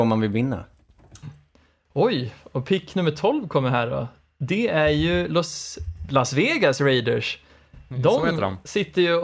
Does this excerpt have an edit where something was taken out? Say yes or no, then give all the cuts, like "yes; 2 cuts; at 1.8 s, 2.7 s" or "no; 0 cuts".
no; 0 cuts